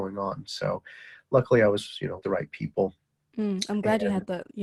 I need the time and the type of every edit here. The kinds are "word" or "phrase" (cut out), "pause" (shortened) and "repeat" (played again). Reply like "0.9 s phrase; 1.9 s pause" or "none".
2.2 s word